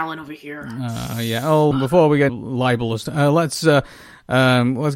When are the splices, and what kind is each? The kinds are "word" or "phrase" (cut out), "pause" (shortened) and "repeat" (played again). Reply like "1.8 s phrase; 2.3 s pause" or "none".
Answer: 1.7 s word; 2.3 s word; 3.1 s word